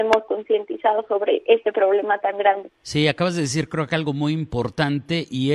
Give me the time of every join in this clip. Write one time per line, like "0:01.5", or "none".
0:02.8